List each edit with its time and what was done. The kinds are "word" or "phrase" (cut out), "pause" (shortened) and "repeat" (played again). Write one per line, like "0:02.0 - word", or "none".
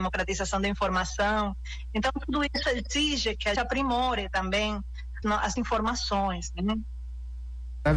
0:02.6 - word
0:03.6 - word
0:05.2 - word
0:05.6 - word